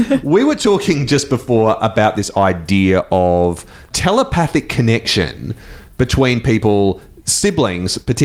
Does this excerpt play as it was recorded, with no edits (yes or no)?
yes